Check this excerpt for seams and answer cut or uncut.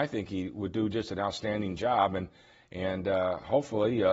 uncut